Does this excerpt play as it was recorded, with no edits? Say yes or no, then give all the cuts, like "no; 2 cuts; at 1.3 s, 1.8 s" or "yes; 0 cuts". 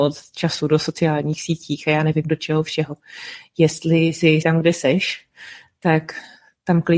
no; 1 cut; at 4.4 s